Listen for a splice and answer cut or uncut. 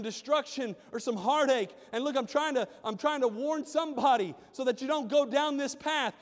uncut